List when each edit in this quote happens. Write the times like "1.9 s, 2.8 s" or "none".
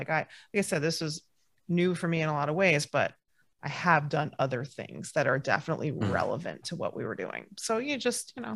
none